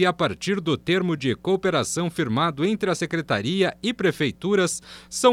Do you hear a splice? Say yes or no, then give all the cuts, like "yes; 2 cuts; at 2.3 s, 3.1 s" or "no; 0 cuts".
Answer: no; 0 cuts